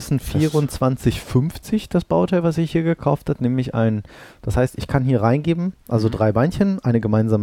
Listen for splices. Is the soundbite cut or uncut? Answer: uncut